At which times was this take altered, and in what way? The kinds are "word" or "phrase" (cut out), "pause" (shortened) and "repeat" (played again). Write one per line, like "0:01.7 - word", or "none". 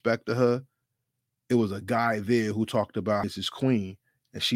0:03.2 - phrase